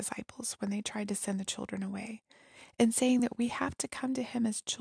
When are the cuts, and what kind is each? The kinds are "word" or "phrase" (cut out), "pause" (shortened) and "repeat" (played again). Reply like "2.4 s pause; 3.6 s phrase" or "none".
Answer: none